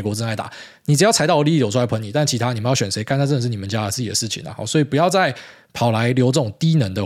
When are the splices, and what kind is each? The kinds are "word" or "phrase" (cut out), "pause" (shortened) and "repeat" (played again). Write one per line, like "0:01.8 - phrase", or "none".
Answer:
none